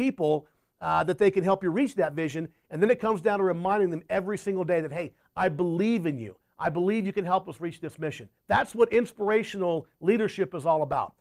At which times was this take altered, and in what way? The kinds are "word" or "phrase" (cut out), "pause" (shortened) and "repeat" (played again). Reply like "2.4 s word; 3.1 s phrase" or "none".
8.4 s pause